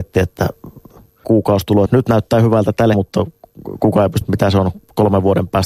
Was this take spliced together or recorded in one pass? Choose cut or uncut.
cut